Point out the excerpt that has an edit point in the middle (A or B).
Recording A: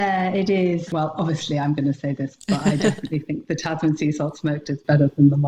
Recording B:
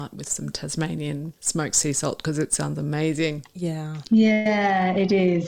B